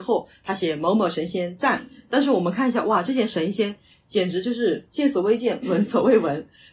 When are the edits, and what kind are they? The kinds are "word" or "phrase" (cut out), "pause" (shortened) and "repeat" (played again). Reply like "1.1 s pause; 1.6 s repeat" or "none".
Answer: none